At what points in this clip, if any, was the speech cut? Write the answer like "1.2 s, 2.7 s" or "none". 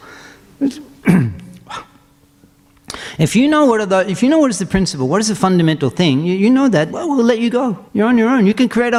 6.9 s, 7.9 s